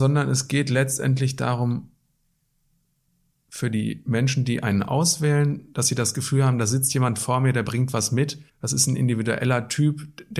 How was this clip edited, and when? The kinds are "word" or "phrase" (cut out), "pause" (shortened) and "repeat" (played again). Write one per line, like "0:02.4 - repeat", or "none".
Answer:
0:08.5 - pause